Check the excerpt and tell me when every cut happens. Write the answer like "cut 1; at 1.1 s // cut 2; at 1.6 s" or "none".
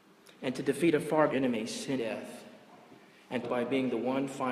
cut 1; at 1.3 s // cut 2; at 2.0 s // cut 3; at 3.4 s